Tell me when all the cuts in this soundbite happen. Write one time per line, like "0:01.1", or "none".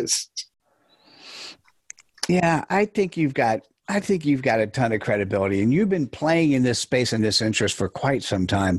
0:02.7
0:07.2

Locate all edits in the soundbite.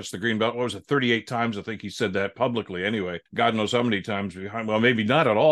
0:03.3

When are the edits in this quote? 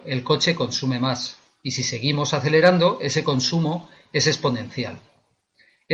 none

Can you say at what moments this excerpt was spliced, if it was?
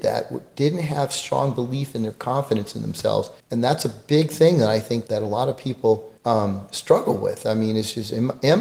0:03.4
0:05.1
0:06.2

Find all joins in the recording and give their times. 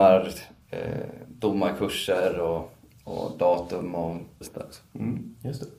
0:04.4

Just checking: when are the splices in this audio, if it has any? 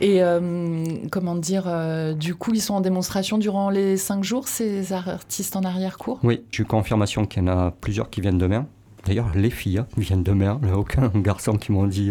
0:06.5

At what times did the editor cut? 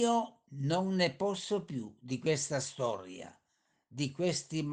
none

